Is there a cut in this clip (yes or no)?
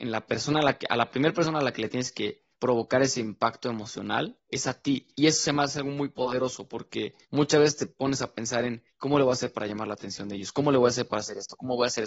yes